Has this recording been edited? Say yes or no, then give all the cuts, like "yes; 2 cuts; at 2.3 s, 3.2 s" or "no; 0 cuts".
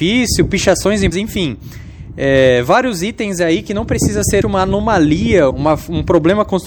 yes; 3 cuts; at 1.1 s, 4.4 s, 5.5 s